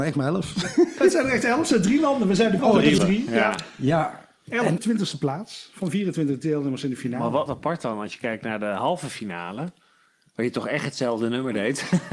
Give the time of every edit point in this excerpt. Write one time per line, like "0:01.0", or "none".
0:02.6
0:03.0
0:04.8
0:07.5